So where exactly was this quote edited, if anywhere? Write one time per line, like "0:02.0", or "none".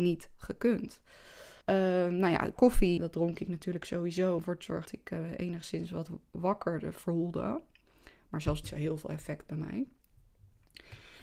0:01.6
0:03.0
0:04.4
0:04.9
0:08.6